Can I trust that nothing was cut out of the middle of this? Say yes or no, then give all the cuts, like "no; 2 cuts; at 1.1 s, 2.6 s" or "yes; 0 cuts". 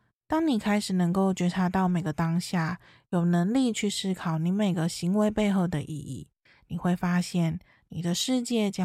yes; 0 cuts